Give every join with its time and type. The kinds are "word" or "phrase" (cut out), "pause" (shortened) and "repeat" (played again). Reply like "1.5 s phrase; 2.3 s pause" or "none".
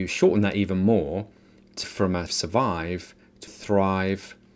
1.8 s word; 2.3 s word; 3.5 s word